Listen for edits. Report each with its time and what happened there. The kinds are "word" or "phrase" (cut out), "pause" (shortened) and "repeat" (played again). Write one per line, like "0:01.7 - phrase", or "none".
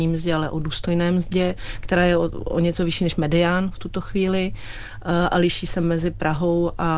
none